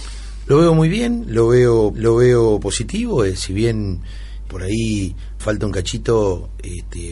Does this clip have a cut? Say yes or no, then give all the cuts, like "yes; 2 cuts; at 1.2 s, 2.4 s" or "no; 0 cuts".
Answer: yes; 3 cuts; at 1.9 s, 4.5 s, 5.4 s